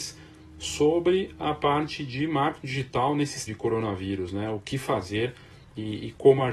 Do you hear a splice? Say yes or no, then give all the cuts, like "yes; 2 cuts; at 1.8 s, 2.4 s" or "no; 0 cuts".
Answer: yes; 1 cut; at 3.5 s